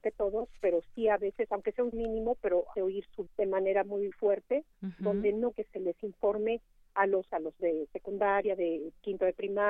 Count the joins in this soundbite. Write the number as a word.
seven